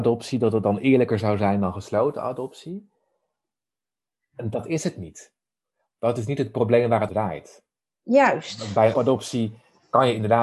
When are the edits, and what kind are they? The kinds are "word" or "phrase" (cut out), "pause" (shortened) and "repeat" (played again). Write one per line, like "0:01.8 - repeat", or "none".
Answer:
0:07.1 - word
0:08.9 - word